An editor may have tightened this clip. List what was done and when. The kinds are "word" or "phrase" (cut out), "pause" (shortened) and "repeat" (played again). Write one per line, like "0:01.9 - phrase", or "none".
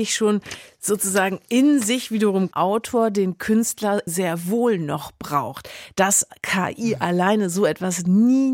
0:02.5 - phrase
0:04.1 - word